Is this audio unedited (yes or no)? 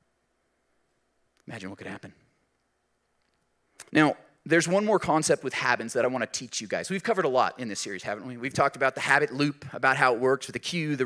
no